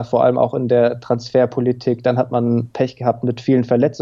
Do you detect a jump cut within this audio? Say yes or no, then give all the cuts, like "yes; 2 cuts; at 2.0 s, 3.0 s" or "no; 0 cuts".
no; 0 cuts